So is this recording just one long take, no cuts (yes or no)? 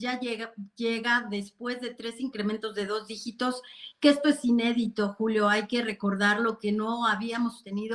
yes